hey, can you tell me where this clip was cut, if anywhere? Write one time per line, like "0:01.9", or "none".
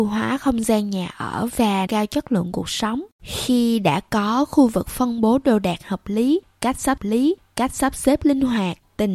0:01.9
0:03.1
0:07.0